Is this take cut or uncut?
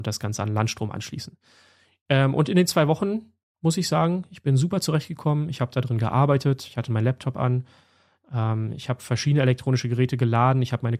uncut